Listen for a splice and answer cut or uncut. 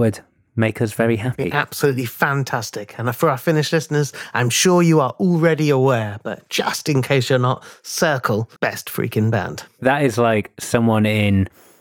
cut